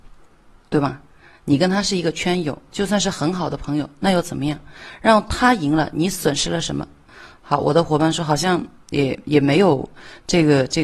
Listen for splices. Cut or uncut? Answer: uncut